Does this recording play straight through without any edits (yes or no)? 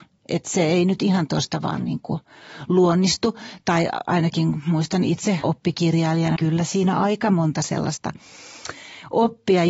no